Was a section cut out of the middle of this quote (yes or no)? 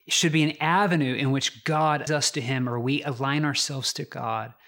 yes